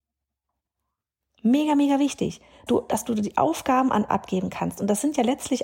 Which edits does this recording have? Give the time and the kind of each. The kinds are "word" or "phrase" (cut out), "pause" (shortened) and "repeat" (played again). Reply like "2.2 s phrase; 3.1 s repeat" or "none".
2.7 s word; 4.1 s word